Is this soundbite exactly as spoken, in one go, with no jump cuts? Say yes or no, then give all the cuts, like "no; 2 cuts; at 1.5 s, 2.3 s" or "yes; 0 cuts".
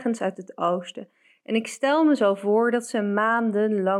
yes; 0 cuts